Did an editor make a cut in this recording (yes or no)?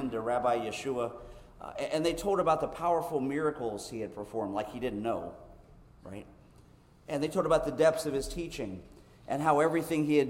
no